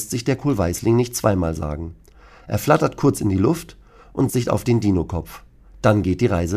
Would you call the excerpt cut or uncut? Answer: cut